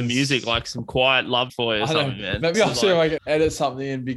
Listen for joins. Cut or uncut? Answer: cut